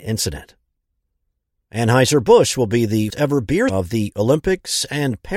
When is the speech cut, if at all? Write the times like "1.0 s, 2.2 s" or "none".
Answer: 3.1 s, 3.7 s